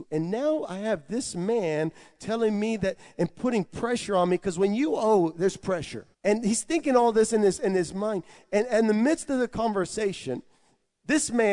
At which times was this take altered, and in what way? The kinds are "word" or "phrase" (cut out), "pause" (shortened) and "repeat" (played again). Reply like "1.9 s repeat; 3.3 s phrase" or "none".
6.1 s pause

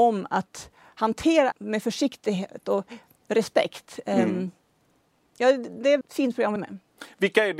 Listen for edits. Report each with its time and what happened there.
1.5 s word; 6.0 s word; 6.6 s word

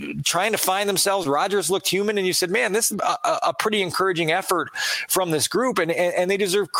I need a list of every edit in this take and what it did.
2.9 s phrase

